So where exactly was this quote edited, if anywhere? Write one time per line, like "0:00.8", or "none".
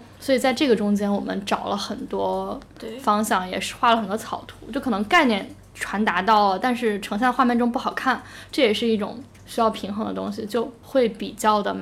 none